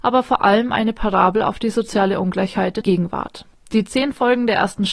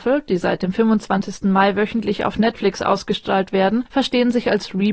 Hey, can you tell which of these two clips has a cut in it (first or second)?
first